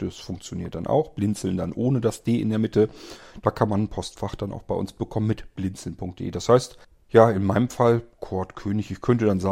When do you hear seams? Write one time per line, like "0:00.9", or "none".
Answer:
0:06.8